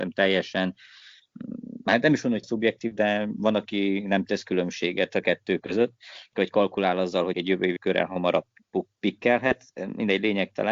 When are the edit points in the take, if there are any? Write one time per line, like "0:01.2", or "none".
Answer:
0:02.4
0:06.3
0:07.3
0:07.8

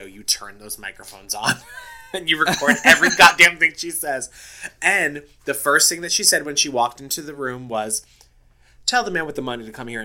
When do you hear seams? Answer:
none

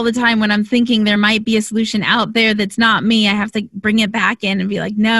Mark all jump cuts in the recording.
none

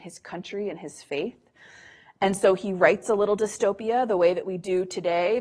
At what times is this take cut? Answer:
none

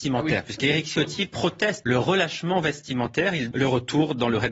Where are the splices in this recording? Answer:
0:01.8
0:03.5

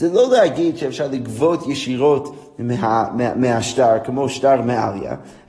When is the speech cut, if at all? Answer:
none

